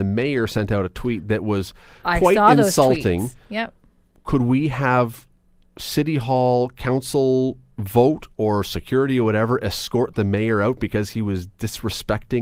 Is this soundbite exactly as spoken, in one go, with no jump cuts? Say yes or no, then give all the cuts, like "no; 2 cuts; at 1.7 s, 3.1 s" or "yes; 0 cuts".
yes; 0 cuts